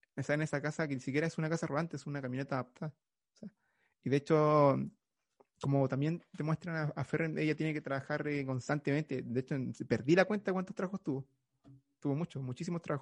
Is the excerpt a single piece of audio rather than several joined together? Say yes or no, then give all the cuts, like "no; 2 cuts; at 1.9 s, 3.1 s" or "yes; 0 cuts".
yes; 0 cuts